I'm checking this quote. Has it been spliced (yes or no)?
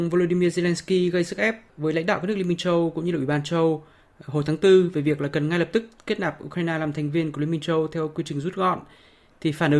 no